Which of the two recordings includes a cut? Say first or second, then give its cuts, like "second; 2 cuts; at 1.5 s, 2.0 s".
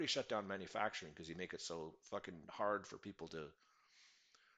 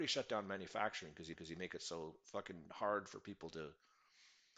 second; 1 cut; at 1.3 s